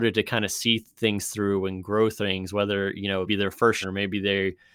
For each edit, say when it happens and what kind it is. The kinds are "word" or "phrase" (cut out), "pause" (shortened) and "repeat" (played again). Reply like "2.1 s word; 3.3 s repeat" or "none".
3.3 s word; 3.8 s word